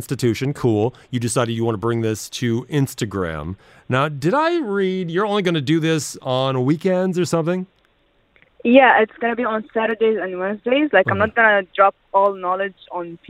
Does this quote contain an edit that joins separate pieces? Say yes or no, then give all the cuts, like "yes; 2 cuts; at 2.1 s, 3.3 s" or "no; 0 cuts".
no; 0 cuts